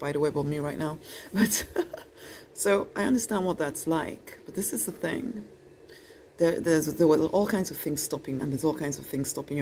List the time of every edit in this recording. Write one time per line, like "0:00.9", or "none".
0:08.4